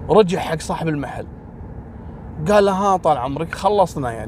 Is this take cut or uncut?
uncut